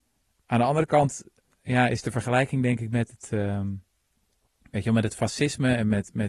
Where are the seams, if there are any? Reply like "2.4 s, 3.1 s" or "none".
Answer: none